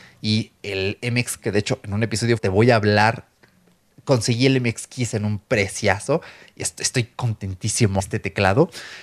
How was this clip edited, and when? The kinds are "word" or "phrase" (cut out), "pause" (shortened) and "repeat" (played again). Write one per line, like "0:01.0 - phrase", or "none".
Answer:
0:01.4 - word
0:02.4 - word
0:08.0 - word